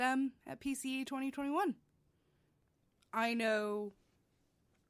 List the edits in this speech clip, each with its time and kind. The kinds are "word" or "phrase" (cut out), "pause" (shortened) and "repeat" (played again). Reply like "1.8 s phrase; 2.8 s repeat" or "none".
none

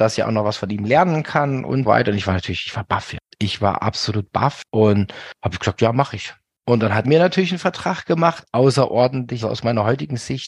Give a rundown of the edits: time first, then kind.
1.9 s word; 7.0 s word; 8.5 s word; 9.4 s word

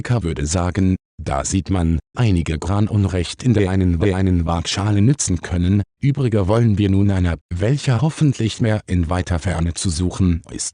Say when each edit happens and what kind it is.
2.1 s word; 4.0 s repeat; 6.0 s word; 7.4 s phrase; 8.6 s word

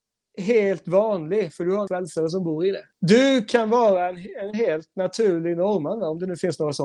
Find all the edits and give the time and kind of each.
1.9 s word; 2.9 s pause

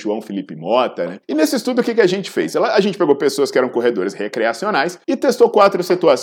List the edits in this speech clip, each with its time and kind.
1.2 s pause; 5.0 s pause

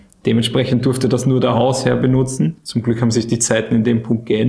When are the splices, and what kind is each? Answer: 2.6 s pause

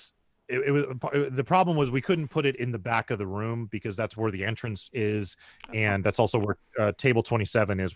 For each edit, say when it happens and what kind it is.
none

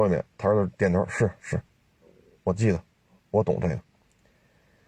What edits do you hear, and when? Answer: none

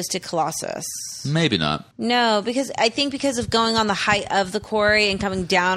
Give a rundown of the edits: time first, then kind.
1.9 s pause

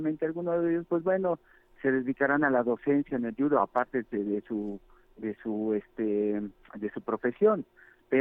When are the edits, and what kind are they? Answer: none

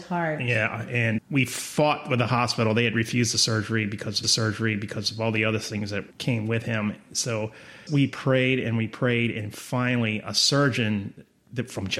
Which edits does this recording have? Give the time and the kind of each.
1.2 s word; 4.2 s repeat; 6.1 s pause; 7.9 s word

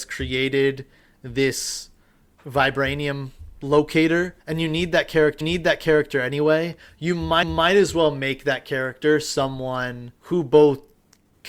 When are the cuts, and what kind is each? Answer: 4.4 s pause; 5.4 s repeat; 7.4 s repeat; 10.2 s pause

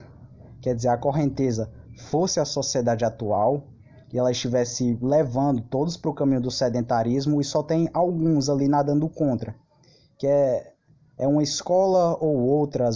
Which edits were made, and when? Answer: none

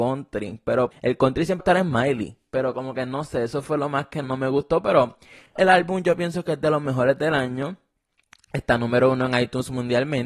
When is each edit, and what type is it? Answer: 0.9 s word; 1.6 s word; 4.2 s word; 5.6 s word

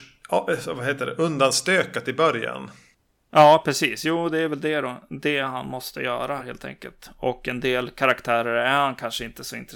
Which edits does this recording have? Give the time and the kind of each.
6.4 s word

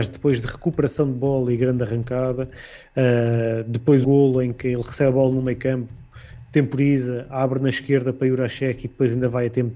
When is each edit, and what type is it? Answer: 4.0 s word

